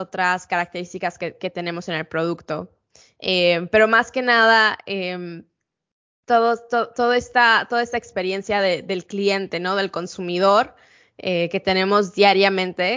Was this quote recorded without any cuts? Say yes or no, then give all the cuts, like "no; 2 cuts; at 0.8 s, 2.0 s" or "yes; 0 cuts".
yes; 0 cuts